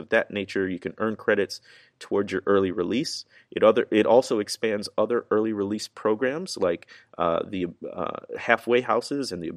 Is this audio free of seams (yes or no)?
yes